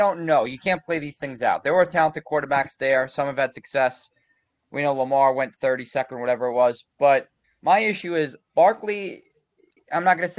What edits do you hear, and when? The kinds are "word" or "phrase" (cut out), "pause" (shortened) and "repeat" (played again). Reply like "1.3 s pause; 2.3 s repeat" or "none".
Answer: 7.4 s pause; 8.4 s pause